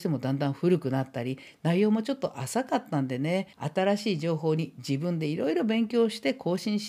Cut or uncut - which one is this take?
cut